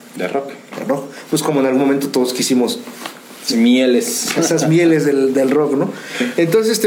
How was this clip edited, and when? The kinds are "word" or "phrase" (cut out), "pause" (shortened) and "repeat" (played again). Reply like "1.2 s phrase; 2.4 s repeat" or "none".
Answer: 3.5 s phrase